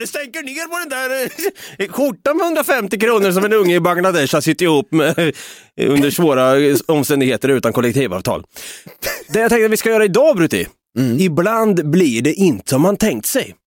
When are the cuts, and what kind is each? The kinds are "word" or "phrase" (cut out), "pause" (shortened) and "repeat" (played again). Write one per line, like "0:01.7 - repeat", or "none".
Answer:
0:12.7 - word

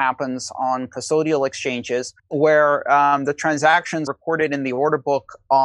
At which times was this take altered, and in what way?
0:02.2 - pause
0:04.1 - word

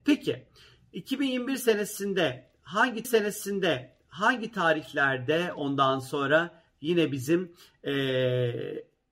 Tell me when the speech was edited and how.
0:03.0 - repeat

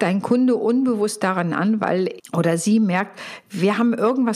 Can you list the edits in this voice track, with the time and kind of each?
0:02.2 - word

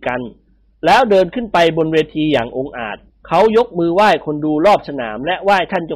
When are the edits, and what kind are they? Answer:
0:03.1 - pause

